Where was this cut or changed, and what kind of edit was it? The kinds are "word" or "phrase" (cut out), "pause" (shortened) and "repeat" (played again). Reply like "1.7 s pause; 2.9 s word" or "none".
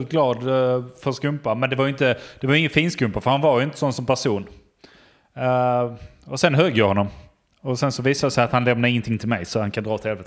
none